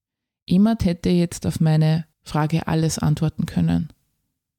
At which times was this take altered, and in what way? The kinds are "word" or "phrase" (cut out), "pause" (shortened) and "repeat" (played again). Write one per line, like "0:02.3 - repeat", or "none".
0:02.1 - pause